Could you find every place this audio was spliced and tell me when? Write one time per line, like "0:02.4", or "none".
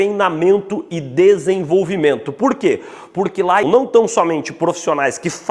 0:03.6